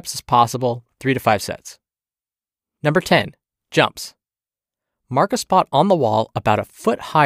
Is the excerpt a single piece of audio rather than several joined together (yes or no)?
yes